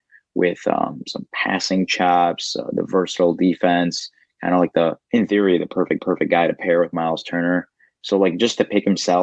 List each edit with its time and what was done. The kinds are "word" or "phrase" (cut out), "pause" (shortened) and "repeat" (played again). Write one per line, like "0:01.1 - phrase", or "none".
0:05.0 - pause
0:06.0 - repeat